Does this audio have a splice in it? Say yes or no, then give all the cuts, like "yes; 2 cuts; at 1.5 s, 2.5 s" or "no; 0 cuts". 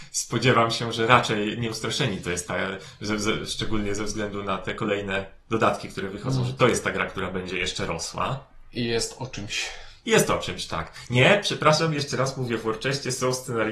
no; 0 cuts